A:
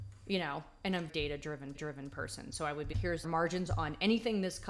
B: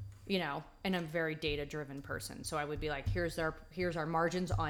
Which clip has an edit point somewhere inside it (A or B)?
A